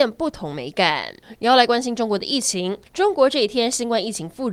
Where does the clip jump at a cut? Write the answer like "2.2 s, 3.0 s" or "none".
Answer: 2.9 s